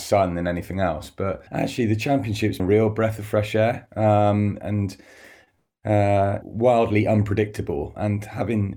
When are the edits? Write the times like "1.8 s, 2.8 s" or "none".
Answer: 1.5 s, 2.6 s, 4.6 s, 6.4 s